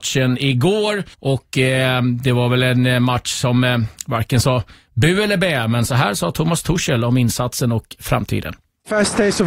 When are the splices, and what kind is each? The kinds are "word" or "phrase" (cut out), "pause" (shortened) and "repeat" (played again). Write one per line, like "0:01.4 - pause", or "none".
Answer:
0:01.1 - pause